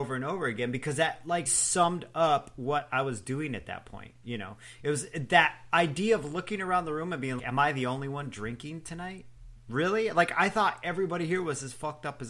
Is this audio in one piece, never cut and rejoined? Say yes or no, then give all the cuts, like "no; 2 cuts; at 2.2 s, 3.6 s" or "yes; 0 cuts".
no; 2 cuts; at 1.5 s, 7.4 s